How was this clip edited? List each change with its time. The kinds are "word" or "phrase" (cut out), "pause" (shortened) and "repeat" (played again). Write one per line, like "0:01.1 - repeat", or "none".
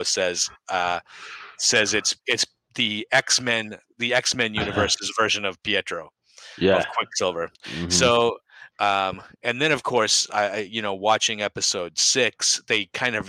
0:07.5 - pause
0:08.7 - pause